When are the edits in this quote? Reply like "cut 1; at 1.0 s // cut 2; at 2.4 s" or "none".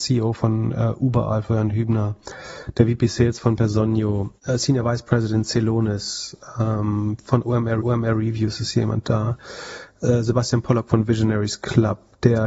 cut 1; at 7.8 s